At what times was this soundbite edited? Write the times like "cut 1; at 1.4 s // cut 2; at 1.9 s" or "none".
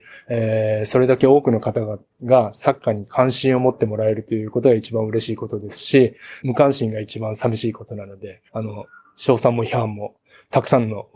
cut 1; at 6.4 s // cut 2; at 8.5 s